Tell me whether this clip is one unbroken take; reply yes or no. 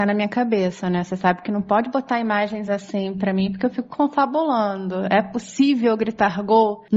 yes